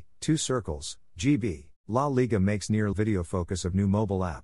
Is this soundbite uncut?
no; 2 cuts; at 1.8 s, 2.9 s

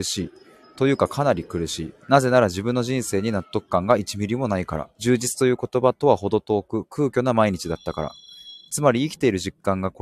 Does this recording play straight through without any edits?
no; 2 cuts; at 2.0 s, 4.9 s

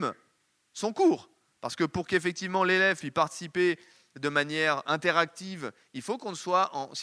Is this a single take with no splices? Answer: yes; 0 cuts

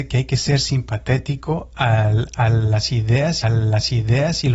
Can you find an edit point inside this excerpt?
yes; 1 cut; at 3.4 s

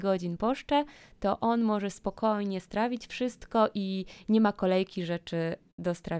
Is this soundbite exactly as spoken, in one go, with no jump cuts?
yes; 0 cuts

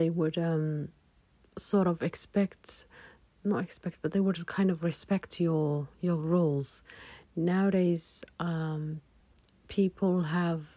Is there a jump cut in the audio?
no; 0 cuts

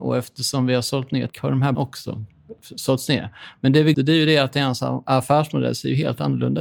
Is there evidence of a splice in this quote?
yes; 3 cuts; at 1.3 s, 1.7 s, 3.9 s

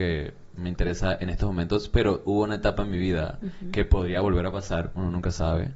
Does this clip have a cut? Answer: no; 0 cuts

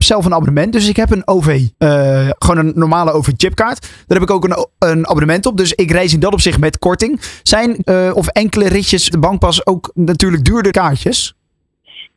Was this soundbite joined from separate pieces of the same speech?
yes; 4 cuts; at 1.7 s, 7.8 s, 9.1 s, 10.7 s

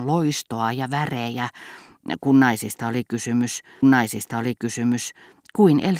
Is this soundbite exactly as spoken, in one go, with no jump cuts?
no; 1 cut; at 3.8 s

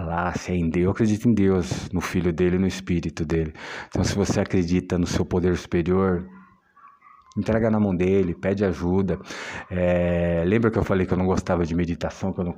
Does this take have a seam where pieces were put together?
no; 0 cuts

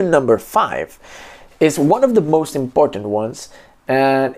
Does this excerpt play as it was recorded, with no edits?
yes; 0 cuts

